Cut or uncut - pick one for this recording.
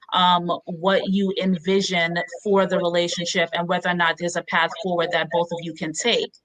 uncut